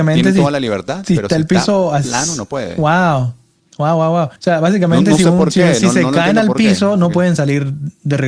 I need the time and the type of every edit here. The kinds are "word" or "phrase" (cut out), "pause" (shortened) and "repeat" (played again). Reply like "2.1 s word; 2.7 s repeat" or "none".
4.4 s pause